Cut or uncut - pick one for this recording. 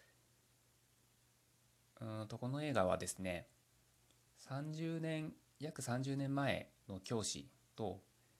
cut